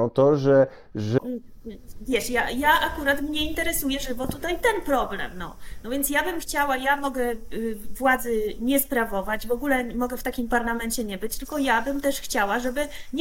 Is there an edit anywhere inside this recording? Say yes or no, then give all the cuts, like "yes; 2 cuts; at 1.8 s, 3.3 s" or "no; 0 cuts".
yes; 1 cut; at 1.2 s